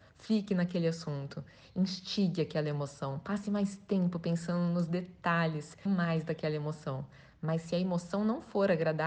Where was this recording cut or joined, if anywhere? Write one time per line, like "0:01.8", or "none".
0:05.9